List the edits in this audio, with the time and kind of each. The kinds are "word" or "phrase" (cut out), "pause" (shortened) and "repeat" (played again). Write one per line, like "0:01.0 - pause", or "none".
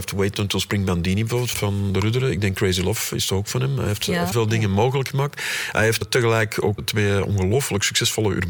0:01.5 - word
0:04.3 - word
0:06.0 - word
0:06.8 - word